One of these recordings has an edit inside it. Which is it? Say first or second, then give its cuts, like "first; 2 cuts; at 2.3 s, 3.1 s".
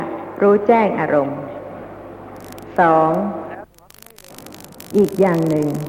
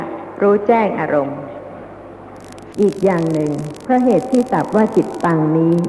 second; 1 cut; at 2.7 s